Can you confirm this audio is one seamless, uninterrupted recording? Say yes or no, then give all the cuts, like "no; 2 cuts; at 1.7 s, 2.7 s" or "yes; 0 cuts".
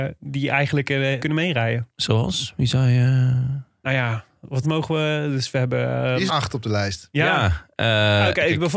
no; 3 cuts; at 1.2 s, 4.6 s, 6.3 s